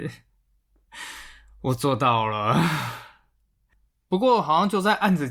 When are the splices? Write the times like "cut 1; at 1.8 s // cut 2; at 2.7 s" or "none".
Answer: none